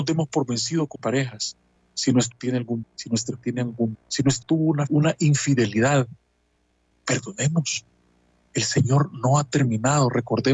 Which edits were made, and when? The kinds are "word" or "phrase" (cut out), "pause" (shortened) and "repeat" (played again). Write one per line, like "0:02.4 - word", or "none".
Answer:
0:01.0 - word
0:02.3 - word
0:02.8 - word
0:03.4 - word
0:03.9 - word
0:04.4 - word
0:04.9 - word
0:06.9 - word

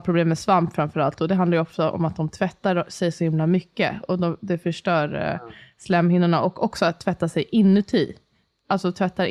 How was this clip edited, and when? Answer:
none

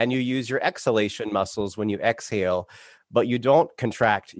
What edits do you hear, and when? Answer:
none

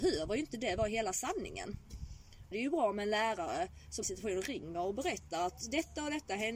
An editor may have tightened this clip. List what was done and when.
0:02.5 - phrase
0:04.0 - phrase

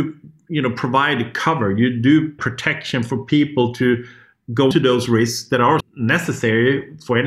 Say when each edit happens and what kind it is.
0:02.4 - phrase
0:04.7 - word
0:05.1 - phrase
0:05.8 - word

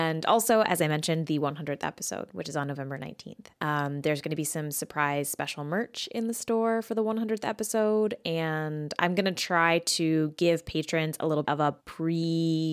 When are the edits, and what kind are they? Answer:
0:03.6 - pause
0:11.4 - word
0:11.8 - pause

